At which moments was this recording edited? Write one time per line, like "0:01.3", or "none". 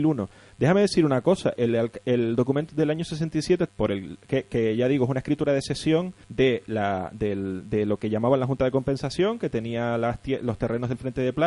0:01.6
0:02.7
0:03.7
0:06.2